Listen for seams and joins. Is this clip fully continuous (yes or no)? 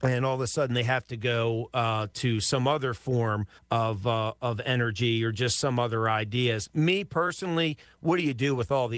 no